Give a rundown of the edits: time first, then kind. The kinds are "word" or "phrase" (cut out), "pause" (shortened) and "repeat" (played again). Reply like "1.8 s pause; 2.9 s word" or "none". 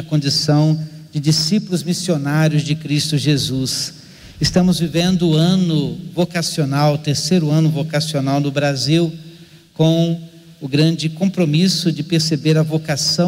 none